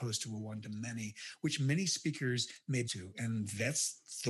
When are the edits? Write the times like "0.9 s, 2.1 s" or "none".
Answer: 2.9 s